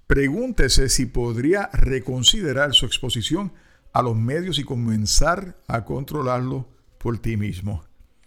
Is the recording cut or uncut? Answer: uncut